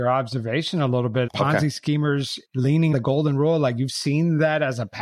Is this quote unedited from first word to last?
no; 2 cuts; at 1.3 s, 2.9 s

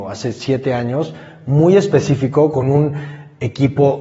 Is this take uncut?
yes; 0 cuts

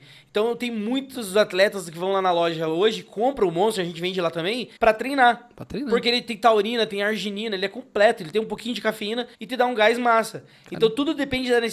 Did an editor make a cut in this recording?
yes; 2 cuts; at 4.8 s, 9.3 s

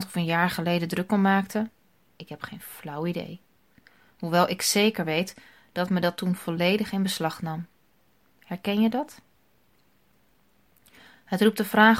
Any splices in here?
no; 0 cuts

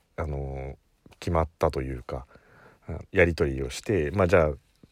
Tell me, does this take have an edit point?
yes; 1 cut; at 3.1 s

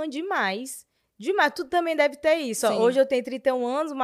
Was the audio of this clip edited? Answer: no; 0 cuts

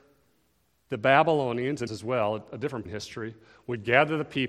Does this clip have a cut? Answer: yes; 2 cuts; at 1.9 s, 2.9 s

